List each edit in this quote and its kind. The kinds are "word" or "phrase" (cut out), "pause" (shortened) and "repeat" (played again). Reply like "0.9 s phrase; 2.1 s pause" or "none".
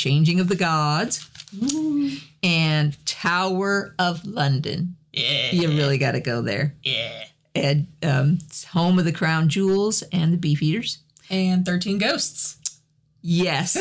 none